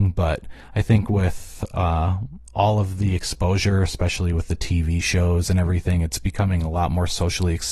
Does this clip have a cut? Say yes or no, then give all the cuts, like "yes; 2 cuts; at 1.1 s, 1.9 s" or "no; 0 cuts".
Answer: no; 0 cuts